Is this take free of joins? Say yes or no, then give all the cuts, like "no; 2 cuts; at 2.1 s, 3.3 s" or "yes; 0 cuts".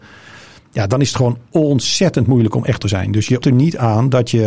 no; 2 cuts; at 2.8 s, 3.4 s